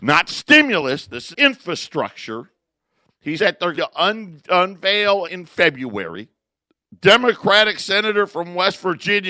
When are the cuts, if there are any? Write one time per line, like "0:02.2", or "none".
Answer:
0:01.3
0:03.4
0:03.8
0:05.2
0:06.5